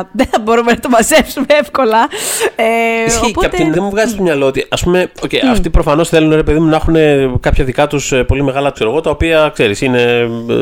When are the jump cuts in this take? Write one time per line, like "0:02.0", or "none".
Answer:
0:03.7
0:05.1
0:08.7